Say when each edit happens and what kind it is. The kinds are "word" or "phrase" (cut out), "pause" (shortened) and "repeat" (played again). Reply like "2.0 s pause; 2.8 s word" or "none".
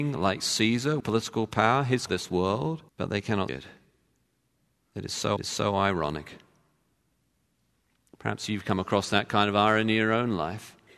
1.0 s word; 2.1 s phrase; 2.9 s pause; 3.5 s word; 5.4 s repeat